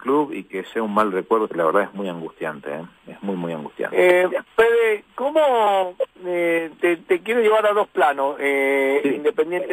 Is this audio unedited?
no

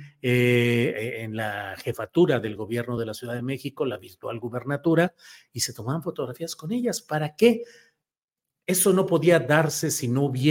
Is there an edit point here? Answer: no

